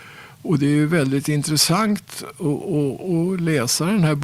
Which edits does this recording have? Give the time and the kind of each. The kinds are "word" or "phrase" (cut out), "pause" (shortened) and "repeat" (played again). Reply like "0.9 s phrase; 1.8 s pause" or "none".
none